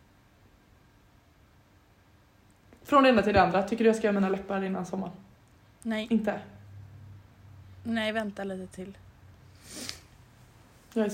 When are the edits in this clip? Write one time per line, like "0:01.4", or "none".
0:05.6